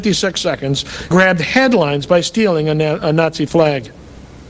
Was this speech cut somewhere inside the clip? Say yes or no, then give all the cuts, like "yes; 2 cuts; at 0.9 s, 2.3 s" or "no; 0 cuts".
yes; 1 cut; at 1.1 s